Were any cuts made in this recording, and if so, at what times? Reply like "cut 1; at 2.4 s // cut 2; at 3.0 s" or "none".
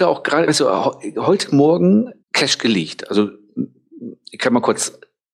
cut 1; at 2.2 s

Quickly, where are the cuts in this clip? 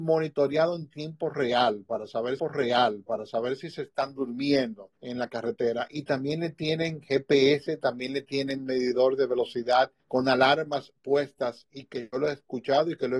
cut 1; at 2.4 s // cut 2; at 5.0 s // cut 3; at 10.0 s

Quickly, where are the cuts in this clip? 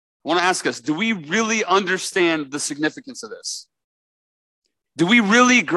none

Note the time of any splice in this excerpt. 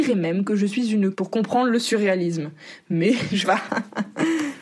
cut 1; at 1.1 s // cut 2; at 3.4 s

